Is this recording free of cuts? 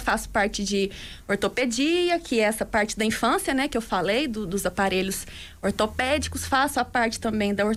yes; 0 cuts

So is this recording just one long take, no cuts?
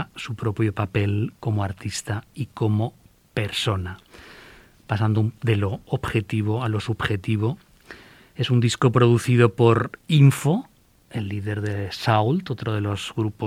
yes; 0 cuts

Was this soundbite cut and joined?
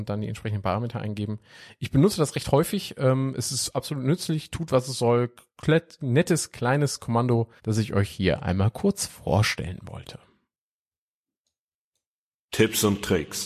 yes; 1 cut; at 7.6 s

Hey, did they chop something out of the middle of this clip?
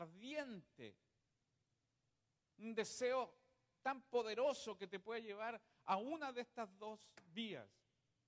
no; 0 cuts

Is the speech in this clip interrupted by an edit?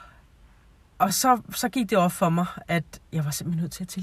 no; 0 cuts

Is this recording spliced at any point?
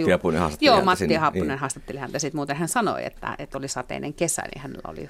no; 0 cuts

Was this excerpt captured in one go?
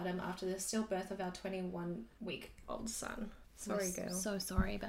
no; 1 cut; at 3.4 s

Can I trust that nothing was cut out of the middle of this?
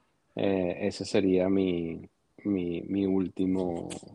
yes; 0 cuts

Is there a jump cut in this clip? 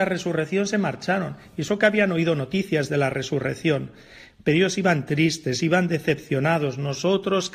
no; 0 cuts

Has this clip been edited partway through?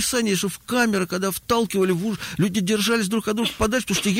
no; 0 cuts

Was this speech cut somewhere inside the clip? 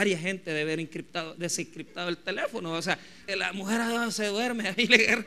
yes; 1 cut; at 3.3 s

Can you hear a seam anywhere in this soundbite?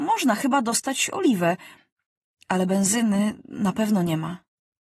no; 0 cuts

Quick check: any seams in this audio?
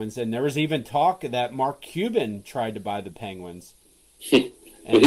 no; 0 cuts

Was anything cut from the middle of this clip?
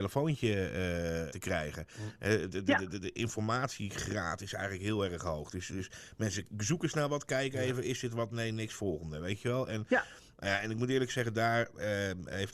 yes; 1 cut; at 1.3 s

